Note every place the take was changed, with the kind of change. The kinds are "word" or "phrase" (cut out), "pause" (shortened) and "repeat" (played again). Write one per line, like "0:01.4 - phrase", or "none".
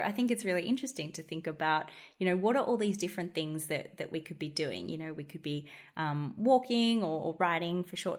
none